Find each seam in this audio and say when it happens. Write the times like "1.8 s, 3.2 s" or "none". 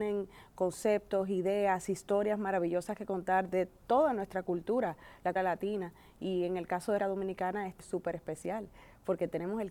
5.4 s, 7.0 s, 7.8 s